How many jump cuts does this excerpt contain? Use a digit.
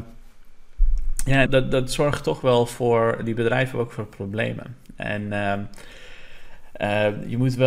1